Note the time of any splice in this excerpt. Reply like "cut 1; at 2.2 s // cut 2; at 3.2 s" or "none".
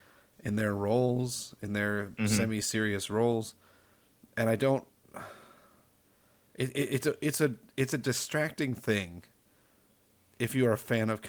none